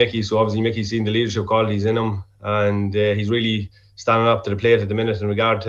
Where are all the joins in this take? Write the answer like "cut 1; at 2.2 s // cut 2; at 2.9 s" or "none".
none